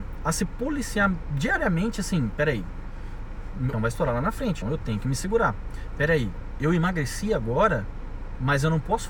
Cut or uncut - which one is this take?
cut